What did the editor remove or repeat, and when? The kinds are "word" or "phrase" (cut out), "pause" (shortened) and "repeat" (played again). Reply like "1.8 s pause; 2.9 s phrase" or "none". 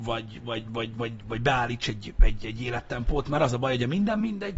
0.9 s word; 2.4 s word

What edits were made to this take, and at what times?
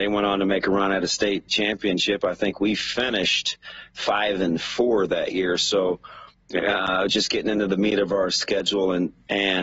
none

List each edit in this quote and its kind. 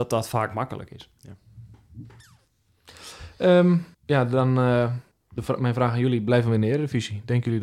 3.9 s pause; 5.1 s pause

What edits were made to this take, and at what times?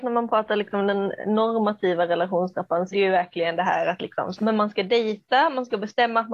2.9 s word; 4.4 s word

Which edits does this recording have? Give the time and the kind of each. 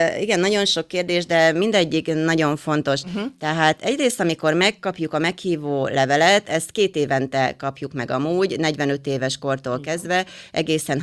none

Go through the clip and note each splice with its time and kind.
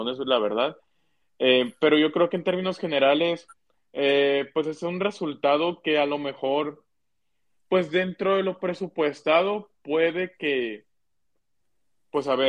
none

